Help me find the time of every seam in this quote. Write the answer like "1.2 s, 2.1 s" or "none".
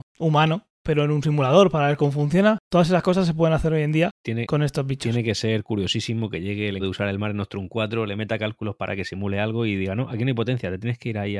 6.8 s